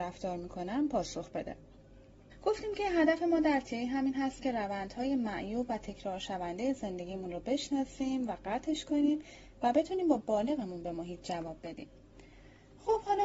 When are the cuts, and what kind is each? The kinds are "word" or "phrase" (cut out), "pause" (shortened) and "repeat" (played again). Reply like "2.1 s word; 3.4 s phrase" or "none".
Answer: none